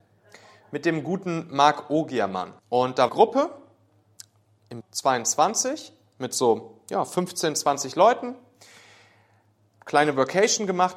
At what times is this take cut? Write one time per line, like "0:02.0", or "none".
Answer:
0:02.6
0:03.1
0:04.8